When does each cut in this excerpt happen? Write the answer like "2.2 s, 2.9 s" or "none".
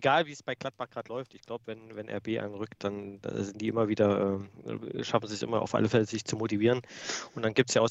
none